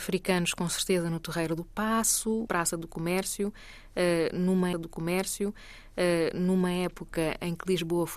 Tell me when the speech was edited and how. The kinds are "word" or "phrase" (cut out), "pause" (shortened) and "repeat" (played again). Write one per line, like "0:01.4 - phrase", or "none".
0:02.5 - word
0:04.7 - repeat